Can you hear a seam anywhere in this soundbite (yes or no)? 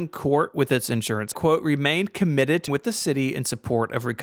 yes